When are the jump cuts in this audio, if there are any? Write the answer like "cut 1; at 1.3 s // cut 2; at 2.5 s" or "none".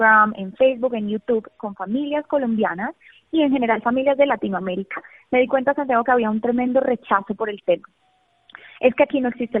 none